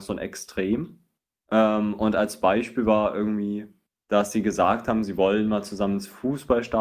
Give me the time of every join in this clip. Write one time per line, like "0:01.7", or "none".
0:01.2
0:03.9